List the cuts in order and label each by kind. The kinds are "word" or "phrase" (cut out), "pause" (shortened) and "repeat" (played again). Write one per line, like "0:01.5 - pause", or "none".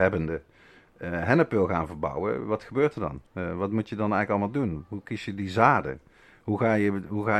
0:03.3 - pause